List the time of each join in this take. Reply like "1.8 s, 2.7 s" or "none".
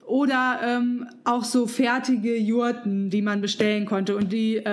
none